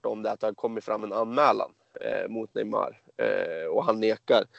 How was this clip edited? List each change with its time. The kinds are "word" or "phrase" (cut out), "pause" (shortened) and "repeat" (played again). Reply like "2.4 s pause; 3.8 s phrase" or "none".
none